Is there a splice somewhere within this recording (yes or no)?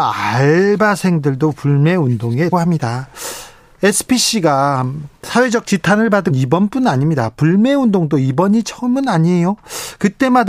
yes